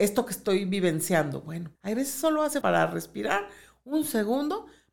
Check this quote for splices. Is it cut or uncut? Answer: cut